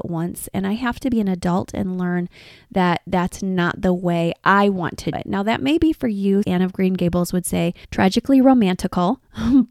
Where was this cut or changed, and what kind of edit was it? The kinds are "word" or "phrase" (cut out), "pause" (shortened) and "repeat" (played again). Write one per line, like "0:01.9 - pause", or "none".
0:05.1 - word
0:06.4 - phrase
0:07.8 - pause